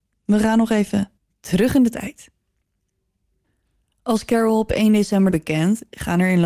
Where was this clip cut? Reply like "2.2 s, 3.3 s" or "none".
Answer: 1.2 s, 3.4 s, 5.3 s